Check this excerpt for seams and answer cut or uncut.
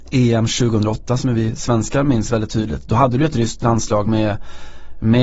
uncut